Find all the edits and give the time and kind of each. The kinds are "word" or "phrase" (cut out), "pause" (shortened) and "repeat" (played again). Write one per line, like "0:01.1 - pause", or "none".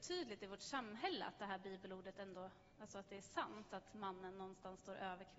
none

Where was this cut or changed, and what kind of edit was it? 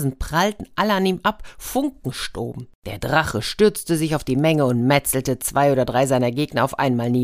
0:02.8 - pause

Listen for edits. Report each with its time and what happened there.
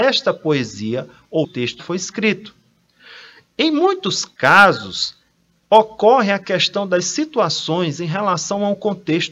0:01.4 - word
0:01.8 - word

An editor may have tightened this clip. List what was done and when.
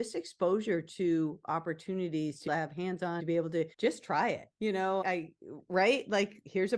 0:02.5 - phrase
0:03.2 - word
0:03.7 - pause
0:04.5 - pause
0:05.0 - word

